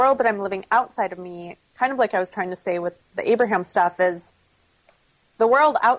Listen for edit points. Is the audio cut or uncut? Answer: uncut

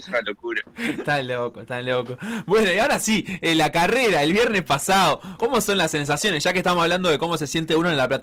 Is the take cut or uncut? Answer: cut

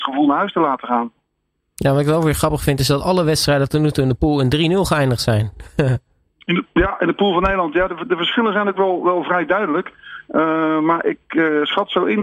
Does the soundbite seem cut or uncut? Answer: uncut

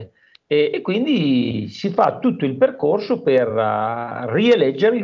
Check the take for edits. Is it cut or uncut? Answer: uncut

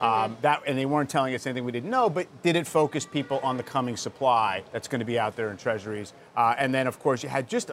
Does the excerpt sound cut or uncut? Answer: cut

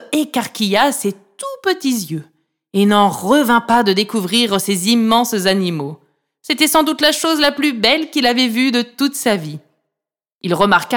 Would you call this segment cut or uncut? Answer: uncut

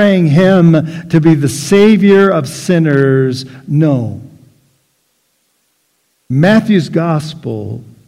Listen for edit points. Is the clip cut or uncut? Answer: uncut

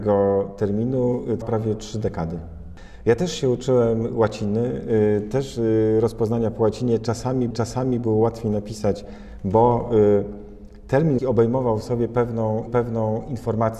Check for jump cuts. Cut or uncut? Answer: cut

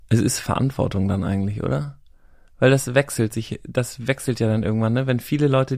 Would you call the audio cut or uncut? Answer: uncut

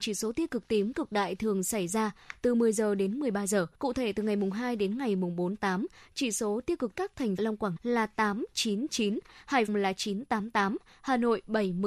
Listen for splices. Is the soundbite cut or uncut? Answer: cut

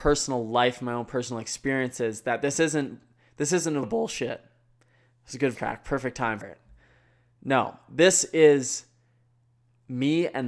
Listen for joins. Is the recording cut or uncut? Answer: cut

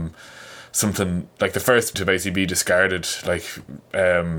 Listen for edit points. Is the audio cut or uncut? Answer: cut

